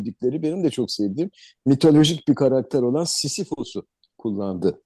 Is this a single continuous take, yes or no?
yes